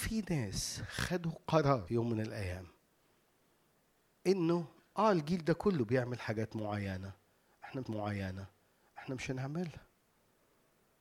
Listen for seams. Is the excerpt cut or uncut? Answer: cut